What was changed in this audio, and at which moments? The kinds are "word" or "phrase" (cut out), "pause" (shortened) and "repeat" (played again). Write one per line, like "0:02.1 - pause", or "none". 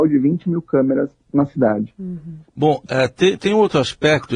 0:02.4 - pause